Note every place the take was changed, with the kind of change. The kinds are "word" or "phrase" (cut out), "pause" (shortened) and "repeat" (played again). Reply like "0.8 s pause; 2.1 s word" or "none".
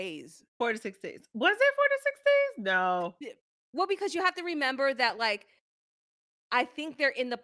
none